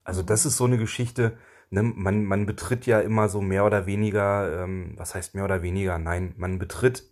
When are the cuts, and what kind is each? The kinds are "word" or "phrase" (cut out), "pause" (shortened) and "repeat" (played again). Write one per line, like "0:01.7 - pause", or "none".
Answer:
none